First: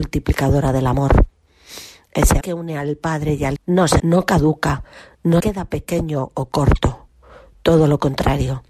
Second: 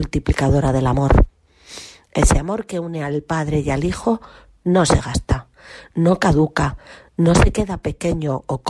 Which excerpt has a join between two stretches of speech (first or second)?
first